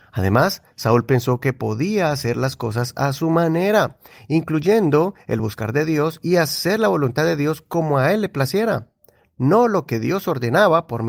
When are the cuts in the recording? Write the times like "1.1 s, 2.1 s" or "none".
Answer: none